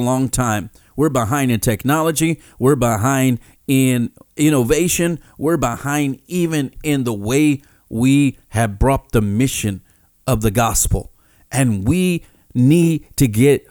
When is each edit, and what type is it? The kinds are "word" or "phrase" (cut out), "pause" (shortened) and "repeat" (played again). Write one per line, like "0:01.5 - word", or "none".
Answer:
none